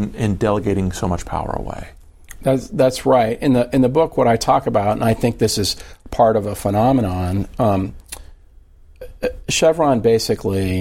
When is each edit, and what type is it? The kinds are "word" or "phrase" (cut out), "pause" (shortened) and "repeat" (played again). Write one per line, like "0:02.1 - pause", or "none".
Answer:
none